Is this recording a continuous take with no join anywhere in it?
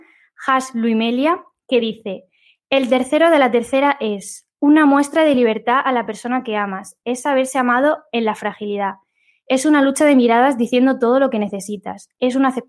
yes; 0 cuts

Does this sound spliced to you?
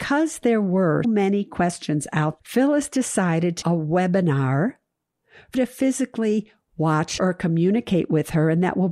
yes; 5 cuts; at 1.0 s, 2.4 s, 3.6 s, 5.5 s, 7.2 s

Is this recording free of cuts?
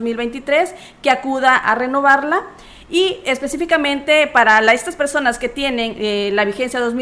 yes; 0 cuts

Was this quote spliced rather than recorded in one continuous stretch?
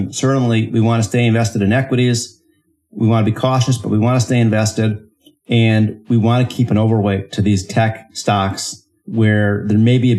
no; 0 cuts

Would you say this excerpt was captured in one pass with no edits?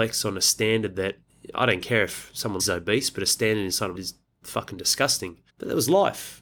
no; 3 cuts; at 2.6 s, 3.9 s, 5.5 s

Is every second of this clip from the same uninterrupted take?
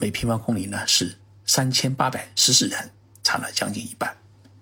yes; 0 cuts

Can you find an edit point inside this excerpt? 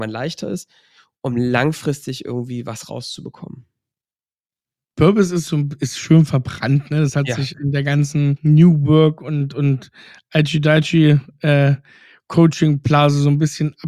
no; 0 cuts

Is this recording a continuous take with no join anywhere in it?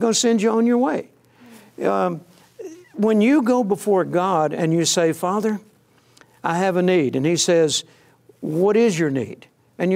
yes; 0 cuts

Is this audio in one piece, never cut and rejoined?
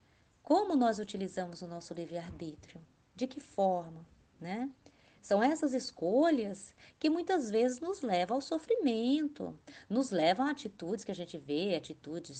yes; 0 cuts

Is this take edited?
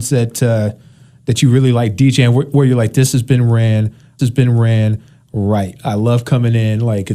yes; 1 cut; at 4.2 s

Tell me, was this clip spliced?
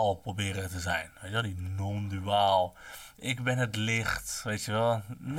no; 0 cuts

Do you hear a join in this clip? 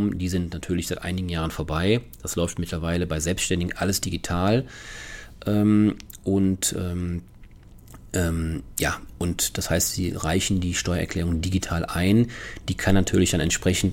no; 0 cuts

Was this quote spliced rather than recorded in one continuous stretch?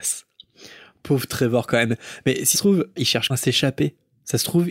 yes; 3 cuts; at 2.5 s, 3.0 s, 3.3 s

